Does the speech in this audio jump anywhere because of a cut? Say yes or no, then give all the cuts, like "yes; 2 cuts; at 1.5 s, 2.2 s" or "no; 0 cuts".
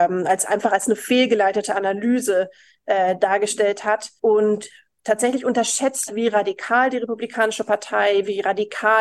yes; 2 cuts; at 4.2 s, 6.1 s